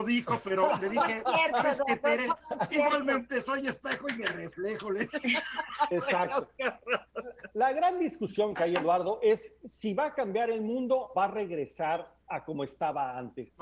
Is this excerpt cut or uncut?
cut